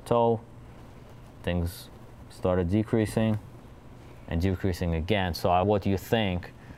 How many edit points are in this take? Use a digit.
1